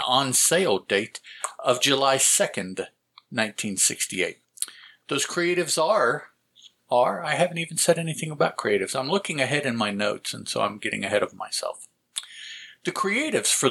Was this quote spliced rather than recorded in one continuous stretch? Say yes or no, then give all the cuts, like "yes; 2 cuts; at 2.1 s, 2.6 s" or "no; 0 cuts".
no; 0 cuts